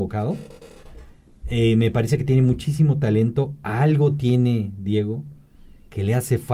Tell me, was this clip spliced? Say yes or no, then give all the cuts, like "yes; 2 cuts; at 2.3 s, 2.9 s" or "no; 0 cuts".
no; 0 cuts